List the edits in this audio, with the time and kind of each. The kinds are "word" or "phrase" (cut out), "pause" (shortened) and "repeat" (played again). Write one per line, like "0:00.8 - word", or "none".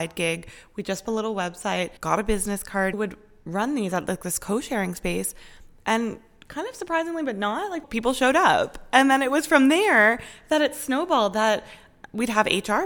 0:01.1 - phrase
0:02.0 - pause
0:02.9 - phrase
0:07.8 - word